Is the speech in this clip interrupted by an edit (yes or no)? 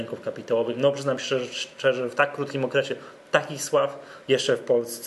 no